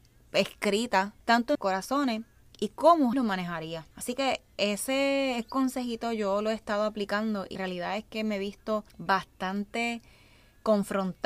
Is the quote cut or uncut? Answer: cut